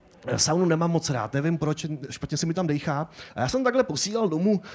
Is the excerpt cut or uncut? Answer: uncut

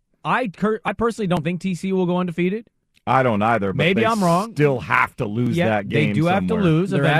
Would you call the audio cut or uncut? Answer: uncut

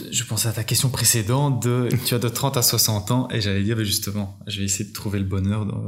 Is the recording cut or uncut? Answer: uncut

